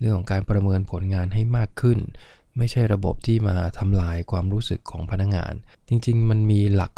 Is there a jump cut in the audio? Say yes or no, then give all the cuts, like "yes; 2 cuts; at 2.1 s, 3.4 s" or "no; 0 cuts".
no; 0 cuts